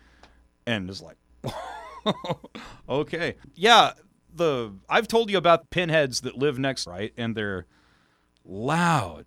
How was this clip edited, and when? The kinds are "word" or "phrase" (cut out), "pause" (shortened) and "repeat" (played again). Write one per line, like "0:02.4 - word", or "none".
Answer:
0:03.4 - word
0:05.6 - word
0:06.9 - phrase